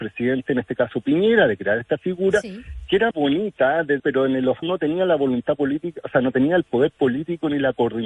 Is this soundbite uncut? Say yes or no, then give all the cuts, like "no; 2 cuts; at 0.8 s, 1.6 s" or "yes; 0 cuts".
no; 3 cuts; at 3.1 s, 4.0 s, 4.6 s